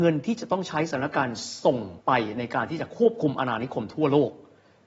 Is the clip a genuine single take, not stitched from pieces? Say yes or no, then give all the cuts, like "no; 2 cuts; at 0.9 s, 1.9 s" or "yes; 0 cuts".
no; 1 cut; at 2.0 s